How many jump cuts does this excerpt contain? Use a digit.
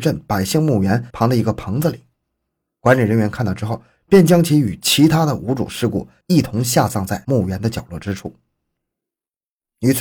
0